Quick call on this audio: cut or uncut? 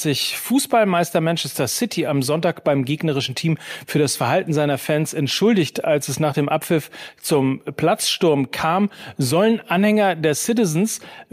uncut